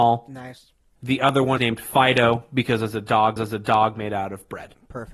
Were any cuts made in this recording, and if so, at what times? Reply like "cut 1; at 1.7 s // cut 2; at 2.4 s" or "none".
cut 1; at 1.6 s // cut 2; at 3.4 s